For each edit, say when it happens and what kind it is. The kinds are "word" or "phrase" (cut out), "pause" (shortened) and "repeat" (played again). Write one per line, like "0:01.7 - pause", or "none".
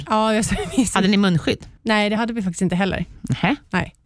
0:01.8 - pause